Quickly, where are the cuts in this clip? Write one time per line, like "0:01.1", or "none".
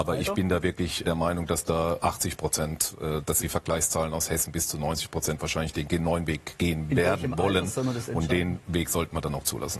0:01.0
0:02.0
0:03.4